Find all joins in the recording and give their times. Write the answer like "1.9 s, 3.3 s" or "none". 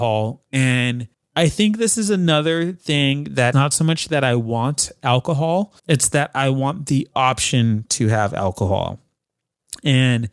1.1 s, 3.5 s, 5.8 s